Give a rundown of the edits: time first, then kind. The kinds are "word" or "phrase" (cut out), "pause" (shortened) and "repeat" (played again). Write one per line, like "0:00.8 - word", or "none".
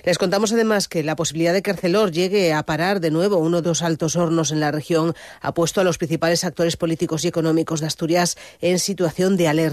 0:03.6 - phrase